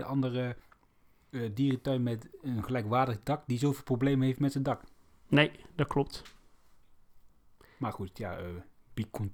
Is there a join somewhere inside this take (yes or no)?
yes